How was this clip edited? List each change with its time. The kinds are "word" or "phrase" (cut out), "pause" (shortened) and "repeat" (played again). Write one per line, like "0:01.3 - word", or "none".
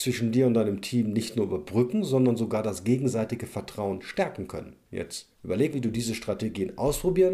0:05.7 - word

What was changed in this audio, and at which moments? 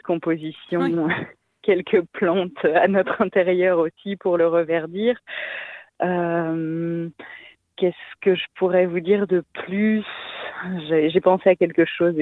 none

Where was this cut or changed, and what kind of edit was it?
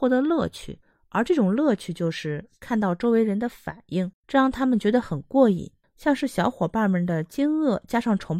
0:04.1 - pause

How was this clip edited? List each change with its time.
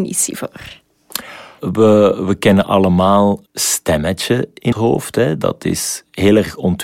0:03.5 - word
0:04.7 - word

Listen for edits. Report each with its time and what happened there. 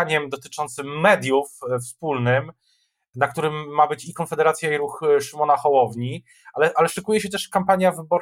none

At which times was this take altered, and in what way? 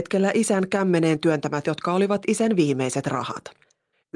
0:01.6 - word

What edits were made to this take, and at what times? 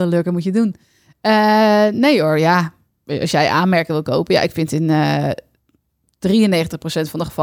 none

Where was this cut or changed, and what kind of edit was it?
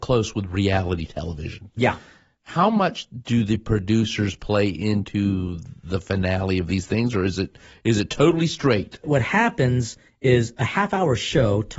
none

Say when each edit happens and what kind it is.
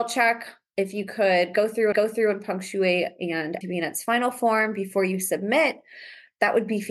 0:01.9 - repeat
0:03.6 - phrase

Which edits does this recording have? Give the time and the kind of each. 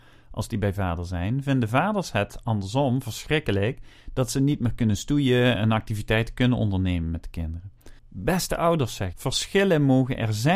0:08.0 - pause
0:09.1 - phrase

